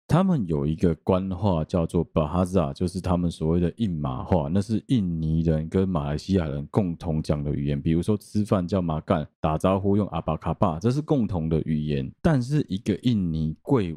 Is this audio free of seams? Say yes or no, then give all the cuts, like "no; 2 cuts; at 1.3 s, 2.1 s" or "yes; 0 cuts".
yes; 0 cuts